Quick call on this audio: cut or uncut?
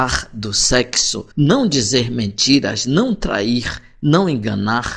cut